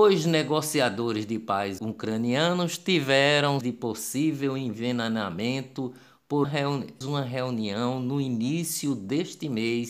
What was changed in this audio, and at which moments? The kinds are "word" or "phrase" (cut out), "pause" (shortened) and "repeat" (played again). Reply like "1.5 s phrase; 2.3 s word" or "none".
1.8 s word; 3.6 s word; 6.4 s word; 7.0 s word